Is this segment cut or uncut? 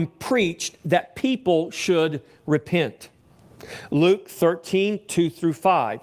uncut